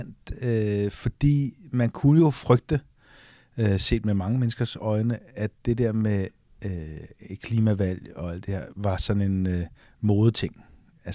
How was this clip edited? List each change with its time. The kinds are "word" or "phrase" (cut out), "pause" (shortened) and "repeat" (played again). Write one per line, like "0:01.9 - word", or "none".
none

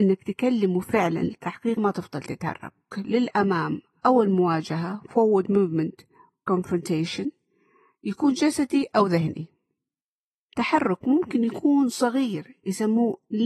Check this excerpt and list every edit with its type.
0:01.8 - word
0:02.9 - word
0:06.5 - word

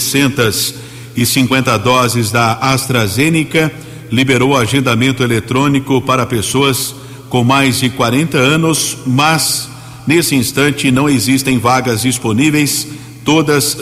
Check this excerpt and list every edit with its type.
none

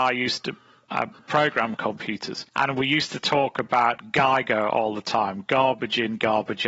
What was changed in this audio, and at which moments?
0:01.2 - pause
0:02.5 - pause

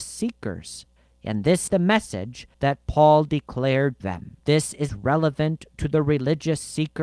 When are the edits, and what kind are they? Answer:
0:01.0 - pause
0:01.7 - word
0:02.5 - pause
0:04.0 - word
0:04.4 - pause
0:04.9 - phrase

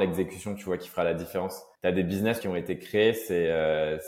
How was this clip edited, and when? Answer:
0:01.8 - pause
0:02.4 - phrase

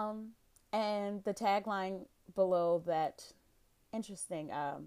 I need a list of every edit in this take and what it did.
0:03.8 - word

